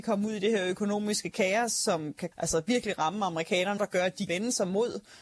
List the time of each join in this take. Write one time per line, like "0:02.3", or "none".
0:02.3
0:03.8
0:04.3